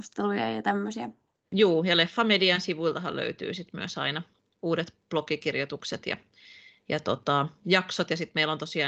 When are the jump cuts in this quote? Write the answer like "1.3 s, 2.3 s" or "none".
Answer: none